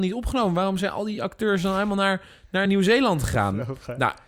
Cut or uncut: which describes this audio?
uncut